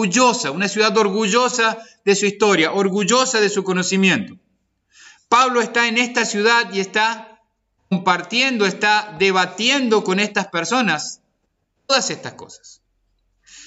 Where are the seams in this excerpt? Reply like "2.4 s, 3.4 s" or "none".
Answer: none